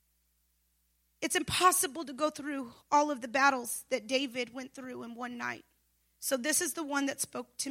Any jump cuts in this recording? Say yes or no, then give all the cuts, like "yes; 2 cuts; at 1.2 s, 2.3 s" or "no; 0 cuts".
no; 0 cuts